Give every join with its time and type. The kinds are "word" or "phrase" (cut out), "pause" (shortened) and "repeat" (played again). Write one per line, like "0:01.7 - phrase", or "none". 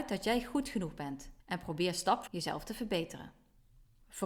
0:01.4 - pause
0:02.3 - word

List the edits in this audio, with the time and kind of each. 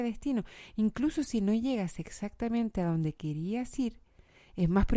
none

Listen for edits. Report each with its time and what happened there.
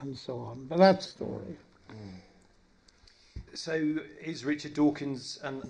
0:01.0 - word
0:03.5 - pause

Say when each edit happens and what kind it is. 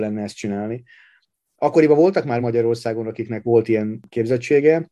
none

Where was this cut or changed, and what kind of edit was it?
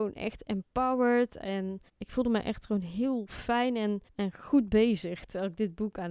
0:01.9 - pause
0:04.1 - pause

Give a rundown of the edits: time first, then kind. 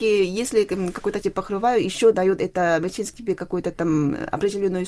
0:01.2 - word
0:02.1 - word
0:03.1 - word

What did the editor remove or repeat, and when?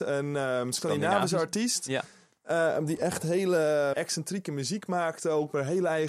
0:03.9 - word

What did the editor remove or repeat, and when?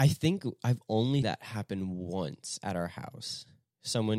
0:01.2 - word

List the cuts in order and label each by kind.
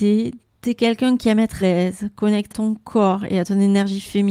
0:01.6 - word
0:02.5 - word

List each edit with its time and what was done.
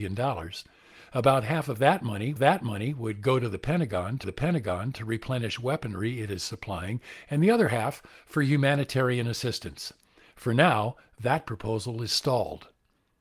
0:02.4 - repeat
0:04.2 - repeat

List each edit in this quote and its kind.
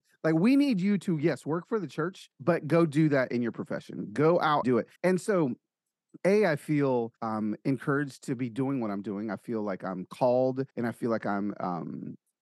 0:02.3 - pause
0:04.6 - word
0:05.0 - pause
0:07.2 - pause
0:10.7 - pause

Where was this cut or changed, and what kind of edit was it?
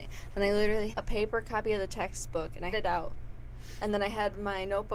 0:00.9 - word
0:02.7 - word

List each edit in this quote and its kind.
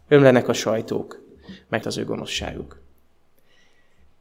0:01.8 - word

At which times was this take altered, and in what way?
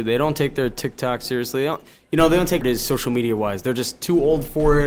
0:02.6 - word

